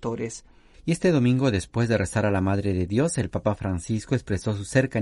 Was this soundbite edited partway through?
no; 0 cuts

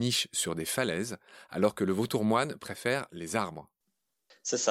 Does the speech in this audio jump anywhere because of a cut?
no; 0 cuts

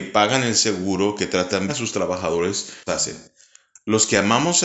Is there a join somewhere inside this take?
yes; 2 cuts; at 1.7 s, 2.9 s

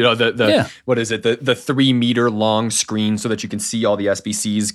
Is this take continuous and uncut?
yes; 0 cuts

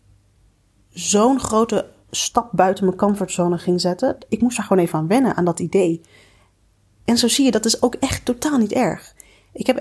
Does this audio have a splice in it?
no; 0 cuts

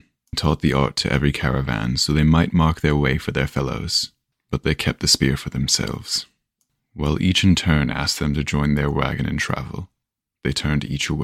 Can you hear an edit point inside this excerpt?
no; 0 cuts

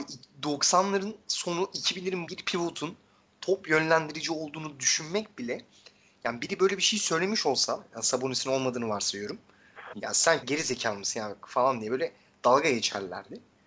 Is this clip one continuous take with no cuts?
no; 3 cuts; at 2.3 s, 9.9 s, 10.4 s

